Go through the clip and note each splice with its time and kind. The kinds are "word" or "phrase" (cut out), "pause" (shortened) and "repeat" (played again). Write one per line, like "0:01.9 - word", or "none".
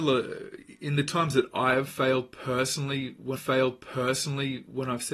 0:03.4 - repeat